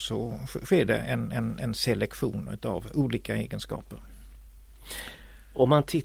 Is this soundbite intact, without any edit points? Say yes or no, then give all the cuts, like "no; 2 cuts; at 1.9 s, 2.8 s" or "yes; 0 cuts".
yes; 0 cuts